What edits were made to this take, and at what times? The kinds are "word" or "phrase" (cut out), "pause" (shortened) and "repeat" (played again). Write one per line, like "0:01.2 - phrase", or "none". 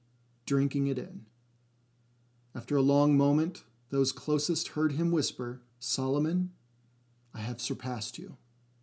0:05.7 - pause